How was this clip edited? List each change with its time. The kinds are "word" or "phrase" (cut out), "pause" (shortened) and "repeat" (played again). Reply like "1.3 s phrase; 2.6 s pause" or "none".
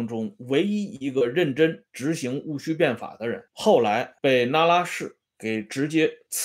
3.5 s pause; 4.2 s pause; 5.3 s pause